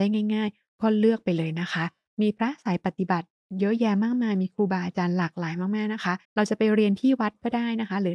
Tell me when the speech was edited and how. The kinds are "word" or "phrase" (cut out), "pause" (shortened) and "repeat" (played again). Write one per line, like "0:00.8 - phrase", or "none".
0:06.2 - pause